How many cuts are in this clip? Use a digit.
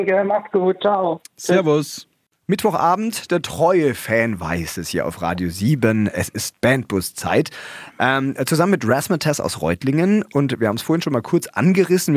0